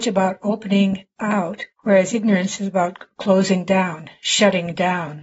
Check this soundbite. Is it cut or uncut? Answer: cut